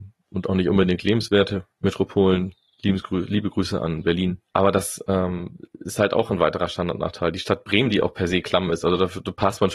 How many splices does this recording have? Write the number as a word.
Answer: one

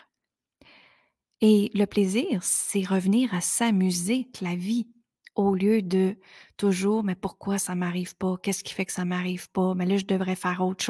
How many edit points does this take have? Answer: one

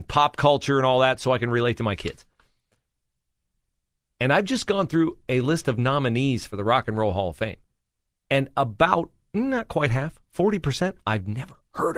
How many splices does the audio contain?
zero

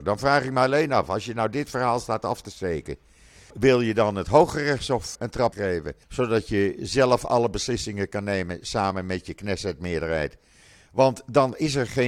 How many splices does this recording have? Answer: four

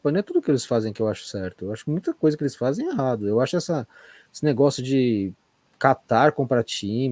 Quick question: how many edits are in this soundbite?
zero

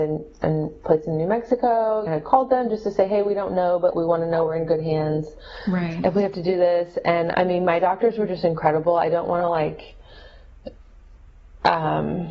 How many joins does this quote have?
three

